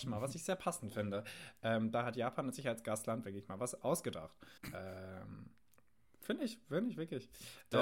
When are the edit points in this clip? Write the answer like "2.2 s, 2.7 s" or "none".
4.6 s